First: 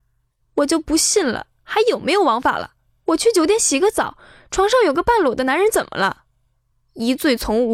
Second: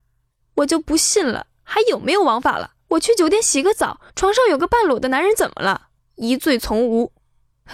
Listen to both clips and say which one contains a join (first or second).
second